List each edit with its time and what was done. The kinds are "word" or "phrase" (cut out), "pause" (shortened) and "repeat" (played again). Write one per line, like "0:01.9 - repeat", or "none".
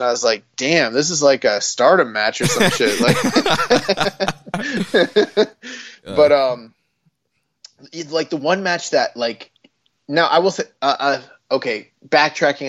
none